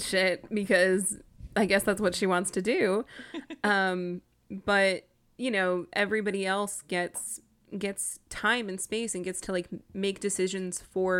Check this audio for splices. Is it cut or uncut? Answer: uncut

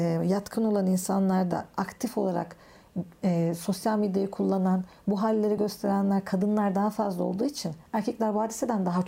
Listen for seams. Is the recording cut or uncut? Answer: uncut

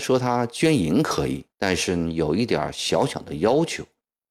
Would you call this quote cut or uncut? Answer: cut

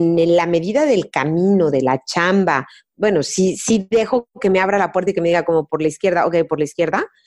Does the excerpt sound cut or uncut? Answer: uncut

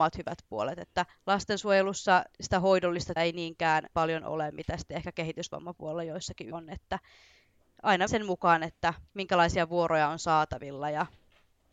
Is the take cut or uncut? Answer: cut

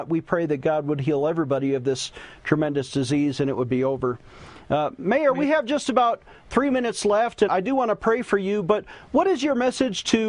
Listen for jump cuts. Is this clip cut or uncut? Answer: cut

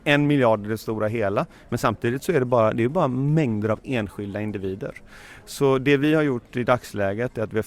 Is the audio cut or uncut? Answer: uncut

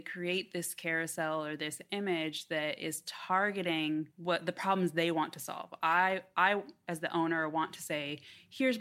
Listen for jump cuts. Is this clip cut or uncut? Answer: cut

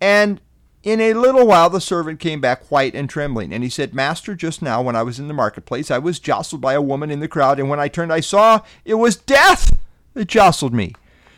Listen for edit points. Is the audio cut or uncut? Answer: uncut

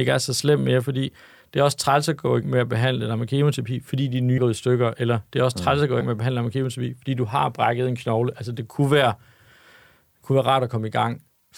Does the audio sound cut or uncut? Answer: cut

